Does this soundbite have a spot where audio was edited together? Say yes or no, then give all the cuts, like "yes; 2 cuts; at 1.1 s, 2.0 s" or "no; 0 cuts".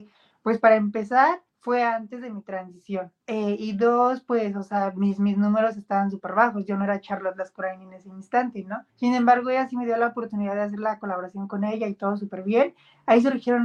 yes; 3 cuts; at 1.5 s, 3.2 s, 8.9 s